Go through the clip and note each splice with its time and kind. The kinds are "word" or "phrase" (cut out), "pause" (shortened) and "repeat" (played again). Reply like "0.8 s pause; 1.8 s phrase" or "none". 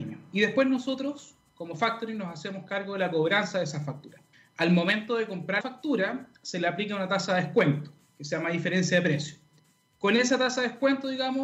4.3 s pause; 5.6 s word; 9.6 s pause